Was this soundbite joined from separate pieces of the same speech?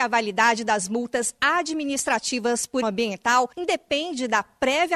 yes; 2 cuts; at 2.8 s, 3.5 s

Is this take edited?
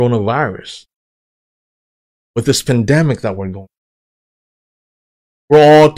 no; 0 cuts

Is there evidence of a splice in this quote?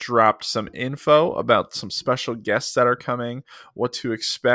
no; 0 cuts

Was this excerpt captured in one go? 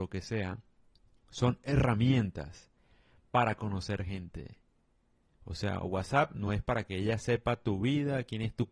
yes; 0 cuts

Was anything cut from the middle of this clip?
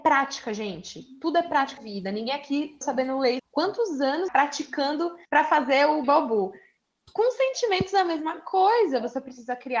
yes; 6 cuts; at 1.8 s, 2.8 s, 3.4 s, 4.3 s, 5.2 s, 6.0 s

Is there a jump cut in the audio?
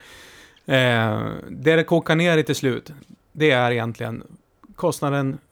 no; 0 cuts

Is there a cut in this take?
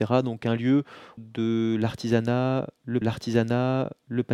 yes; 2 cuts; at 1.2 s, 3.0 s

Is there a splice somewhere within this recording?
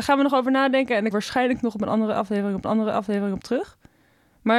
yes; 2 cuts; at 1.1 s, 2.6 s

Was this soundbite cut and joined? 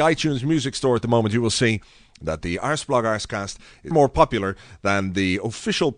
yes; 1 cut; at 3.9 s

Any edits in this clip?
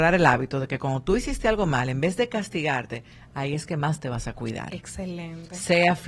no; 0 cuts

